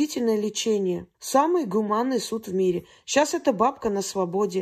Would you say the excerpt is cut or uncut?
cut